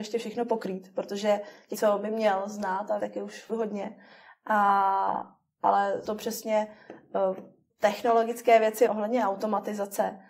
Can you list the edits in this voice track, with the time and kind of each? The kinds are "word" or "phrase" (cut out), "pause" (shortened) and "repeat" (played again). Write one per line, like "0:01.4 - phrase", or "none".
0:01.7 - word
0:03.0 - word
0:03.5 - word
0:06.0 - word
0:07.7 - word
0:08.9 - word